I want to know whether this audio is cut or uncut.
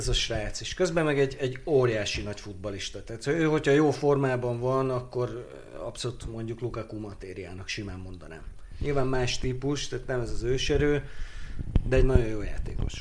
uncut